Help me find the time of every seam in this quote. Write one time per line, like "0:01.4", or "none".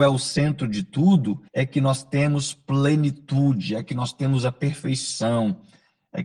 0:01.5